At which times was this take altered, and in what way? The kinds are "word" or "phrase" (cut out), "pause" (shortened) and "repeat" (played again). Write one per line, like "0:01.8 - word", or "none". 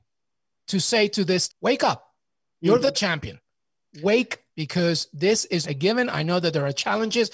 0:01.5 - word
0:02.9 - word
0:04.5 - word
0:05.6 - word